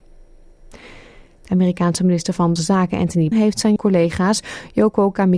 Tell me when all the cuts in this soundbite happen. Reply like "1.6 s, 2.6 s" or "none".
2.6 s, 3.3 s, 3.8 s